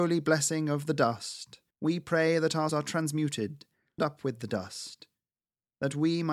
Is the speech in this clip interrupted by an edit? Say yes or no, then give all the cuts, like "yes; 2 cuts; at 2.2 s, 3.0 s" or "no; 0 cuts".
yes; 3 cuts; at 1.7 s, 2.7 s, 4.0 s